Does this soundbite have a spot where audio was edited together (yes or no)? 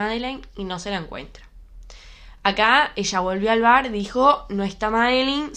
no